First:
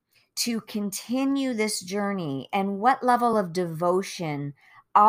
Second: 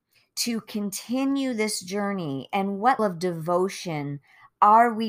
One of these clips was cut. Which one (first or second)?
second